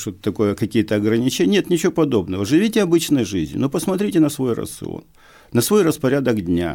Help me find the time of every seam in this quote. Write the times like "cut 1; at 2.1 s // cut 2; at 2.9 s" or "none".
none